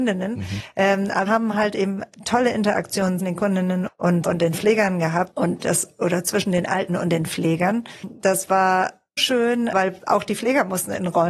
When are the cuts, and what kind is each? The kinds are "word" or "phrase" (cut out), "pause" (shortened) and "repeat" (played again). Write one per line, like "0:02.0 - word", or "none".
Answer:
0:01.3 - word
0:03.2 - word
0:03.9 - word
0:04.2 - word
0:05.6 - word
0:06.9 - word
0:09.2 - word
0:09.7 - word